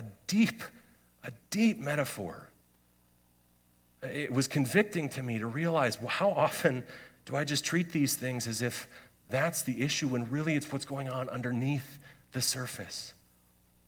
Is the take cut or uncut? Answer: uncut